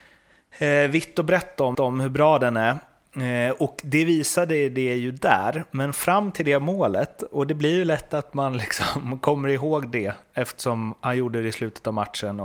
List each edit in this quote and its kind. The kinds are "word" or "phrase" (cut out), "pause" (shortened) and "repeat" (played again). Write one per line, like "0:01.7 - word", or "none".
0:01.7 - repeat